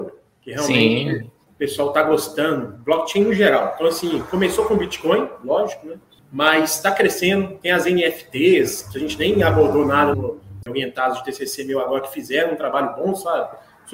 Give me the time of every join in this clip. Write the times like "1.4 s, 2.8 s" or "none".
10.1 s, 10.6 s

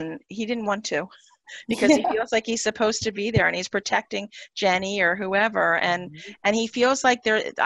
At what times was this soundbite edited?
none

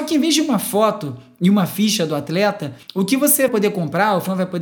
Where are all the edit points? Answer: 2.8 s, 3.5 s

